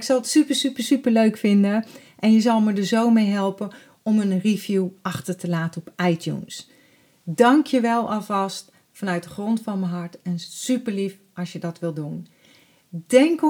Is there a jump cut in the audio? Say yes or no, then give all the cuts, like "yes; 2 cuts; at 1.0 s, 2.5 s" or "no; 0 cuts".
no; 0 cuts